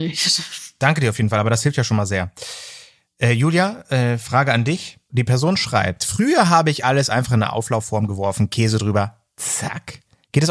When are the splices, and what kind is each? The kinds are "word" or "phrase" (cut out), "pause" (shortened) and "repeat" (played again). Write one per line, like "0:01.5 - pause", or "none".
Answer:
none